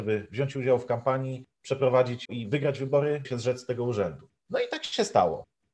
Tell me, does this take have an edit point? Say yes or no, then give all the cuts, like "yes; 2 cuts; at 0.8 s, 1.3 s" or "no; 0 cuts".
yes; 2 cuts; at 2.3 s, 3.2 s